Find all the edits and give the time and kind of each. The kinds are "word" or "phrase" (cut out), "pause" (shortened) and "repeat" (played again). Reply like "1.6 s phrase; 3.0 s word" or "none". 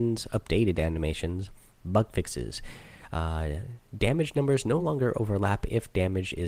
none